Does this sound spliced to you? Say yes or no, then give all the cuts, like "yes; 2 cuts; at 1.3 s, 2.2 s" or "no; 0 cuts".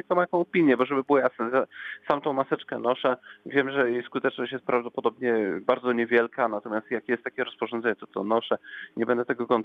no; 0 cuts